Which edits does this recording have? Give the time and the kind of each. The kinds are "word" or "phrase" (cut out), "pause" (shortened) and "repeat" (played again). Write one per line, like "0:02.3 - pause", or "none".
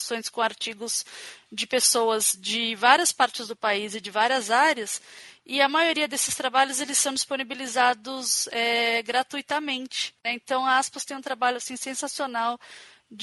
0:10.2 - pause